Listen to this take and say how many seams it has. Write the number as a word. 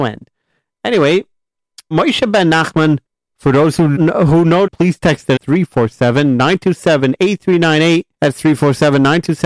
six